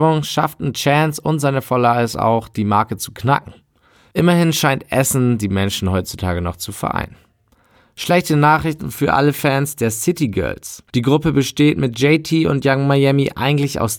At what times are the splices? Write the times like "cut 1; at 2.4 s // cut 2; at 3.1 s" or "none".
cut 1; at 10.9 s